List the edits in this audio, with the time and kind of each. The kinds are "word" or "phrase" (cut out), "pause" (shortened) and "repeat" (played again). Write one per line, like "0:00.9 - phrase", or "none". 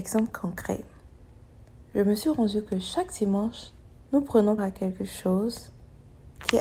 0:02.7 - word
0:04.6 - word